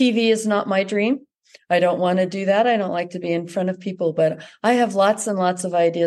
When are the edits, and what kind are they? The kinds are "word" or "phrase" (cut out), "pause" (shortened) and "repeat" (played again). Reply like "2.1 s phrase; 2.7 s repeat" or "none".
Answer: none